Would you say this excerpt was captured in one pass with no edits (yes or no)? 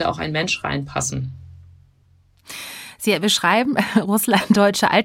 yes